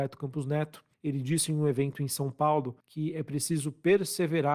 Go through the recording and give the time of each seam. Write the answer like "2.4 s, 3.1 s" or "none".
0.9 s, 2.8 s